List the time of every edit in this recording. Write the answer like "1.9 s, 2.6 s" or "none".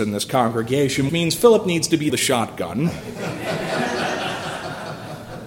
1.1 s, 2.1 s